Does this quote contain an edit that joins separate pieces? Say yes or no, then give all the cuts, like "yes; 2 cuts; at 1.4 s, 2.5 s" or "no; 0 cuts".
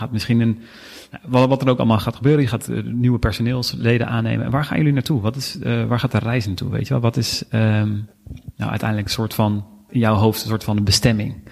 no; 0 cuts